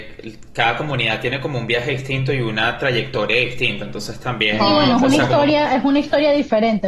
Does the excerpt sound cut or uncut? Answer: uncut